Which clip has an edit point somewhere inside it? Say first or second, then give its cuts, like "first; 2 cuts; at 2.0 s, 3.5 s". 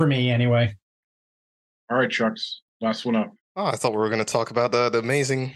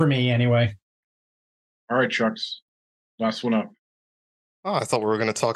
first; 2 cuts; at 2.7 s, 3.4 s